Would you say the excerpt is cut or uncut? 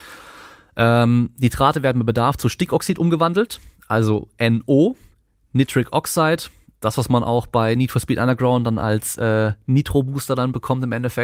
uncut